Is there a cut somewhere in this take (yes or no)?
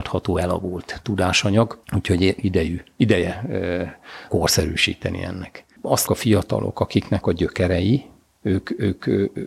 yes